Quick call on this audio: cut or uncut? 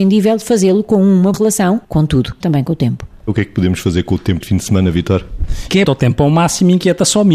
cut